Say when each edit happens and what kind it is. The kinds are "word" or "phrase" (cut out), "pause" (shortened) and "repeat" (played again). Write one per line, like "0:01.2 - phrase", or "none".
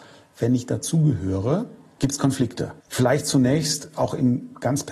0:02.8 - pause